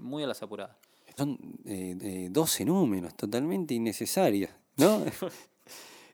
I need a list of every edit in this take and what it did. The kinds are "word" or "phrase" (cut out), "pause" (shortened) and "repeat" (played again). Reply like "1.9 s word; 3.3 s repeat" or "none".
1.2 s word; 2.0 s repeat